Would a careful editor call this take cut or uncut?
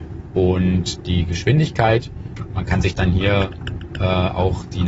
uncut